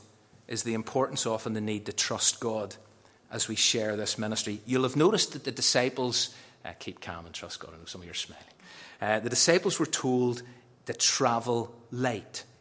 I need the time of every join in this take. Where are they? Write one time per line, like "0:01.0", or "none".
none